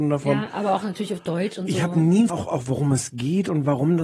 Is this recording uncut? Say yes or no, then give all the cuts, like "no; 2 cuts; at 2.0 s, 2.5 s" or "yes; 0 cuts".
no; 1 cut; at 2.3 s